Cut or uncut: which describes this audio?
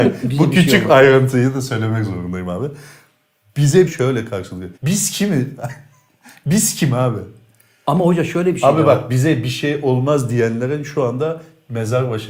cut